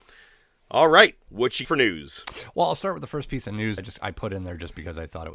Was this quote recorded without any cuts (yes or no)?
no